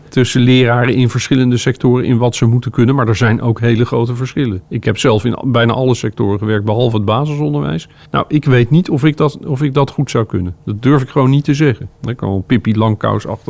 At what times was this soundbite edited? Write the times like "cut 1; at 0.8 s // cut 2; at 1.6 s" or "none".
cut 1; at 4.7 s // cut 2; at 8.1 s // cut 3; at 11.9 s